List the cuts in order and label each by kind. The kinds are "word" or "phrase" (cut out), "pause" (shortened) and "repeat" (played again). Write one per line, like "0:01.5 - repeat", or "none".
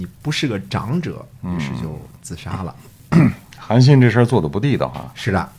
0:03.6 - word